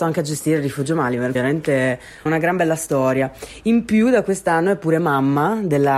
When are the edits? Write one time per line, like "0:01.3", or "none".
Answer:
0:01.3
0:02.3

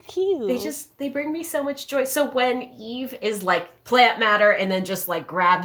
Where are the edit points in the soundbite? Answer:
none

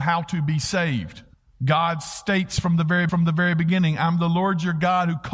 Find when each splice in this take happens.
0:01.3
0:03.1

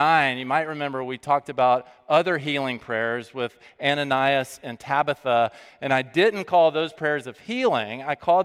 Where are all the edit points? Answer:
0:06.9

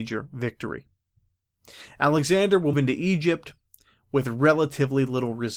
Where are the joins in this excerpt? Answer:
0:02.7

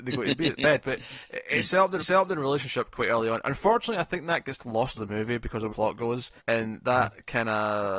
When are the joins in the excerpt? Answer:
0:02.0
0:04.9
0:05.7
0:06.4

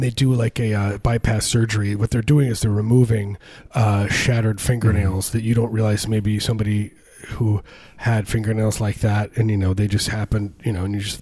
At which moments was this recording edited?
none

